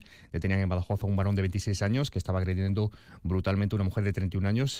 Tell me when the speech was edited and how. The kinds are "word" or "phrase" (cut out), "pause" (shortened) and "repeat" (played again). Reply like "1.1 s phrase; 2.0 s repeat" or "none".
none